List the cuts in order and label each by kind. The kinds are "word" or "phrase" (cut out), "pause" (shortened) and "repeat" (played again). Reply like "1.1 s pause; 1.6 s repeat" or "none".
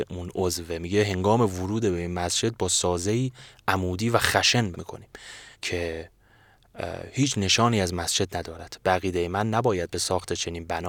4.7 s word; 5.5 s pause